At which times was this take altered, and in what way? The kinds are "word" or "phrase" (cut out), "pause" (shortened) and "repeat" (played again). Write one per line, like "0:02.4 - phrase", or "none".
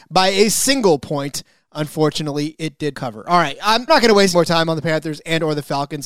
0:02.9 - word
0:03.9 - word
0:04.3 - word